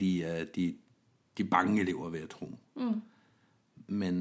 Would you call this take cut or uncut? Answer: uncut